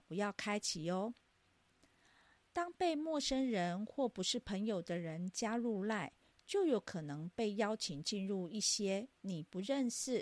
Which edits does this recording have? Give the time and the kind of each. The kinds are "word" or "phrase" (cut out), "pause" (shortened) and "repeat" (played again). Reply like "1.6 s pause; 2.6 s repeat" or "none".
none